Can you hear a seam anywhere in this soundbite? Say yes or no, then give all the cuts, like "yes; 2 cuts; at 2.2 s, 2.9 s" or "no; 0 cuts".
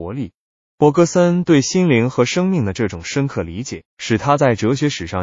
yes; 1 cut; at 3.9 s